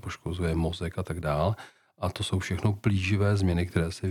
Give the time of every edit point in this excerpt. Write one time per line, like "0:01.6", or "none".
none